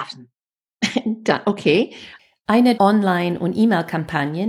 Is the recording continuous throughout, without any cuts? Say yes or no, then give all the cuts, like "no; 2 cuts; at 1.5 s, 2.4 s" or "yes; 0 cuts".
no; 1 cut; at 2.8 s